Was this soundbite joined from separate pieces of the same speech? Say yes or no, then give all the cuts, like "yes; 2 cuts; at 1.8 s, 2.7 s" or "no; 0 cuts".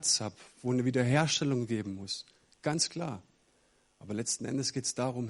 no; 0 cuts